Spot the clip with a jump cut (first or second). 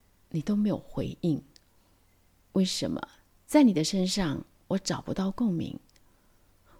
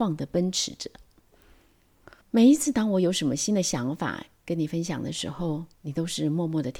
second